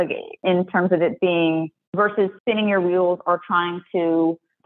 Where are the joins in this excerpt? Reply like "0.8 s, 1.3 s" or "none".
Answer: 2.4 s